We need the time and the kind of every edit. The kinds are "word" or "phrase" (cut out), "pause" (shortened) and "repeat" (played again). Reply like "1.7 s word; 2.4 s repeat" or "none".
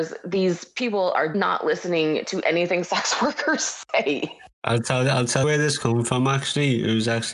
1.3 s word; 4.5 s pause; 5.4 s word